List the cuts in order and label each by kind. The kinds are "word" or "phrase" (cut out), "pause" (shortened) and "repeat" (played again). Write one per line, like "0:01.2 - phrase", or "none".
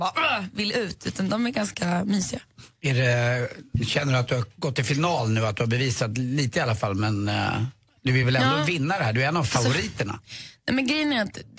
none